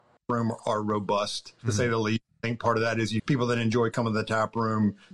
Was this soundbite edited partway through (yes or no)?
yes